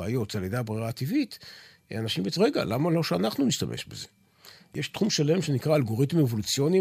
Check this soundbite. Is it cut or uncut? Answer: cut